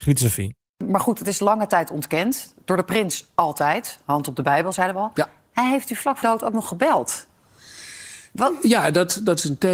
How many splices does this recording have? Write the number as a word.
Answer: one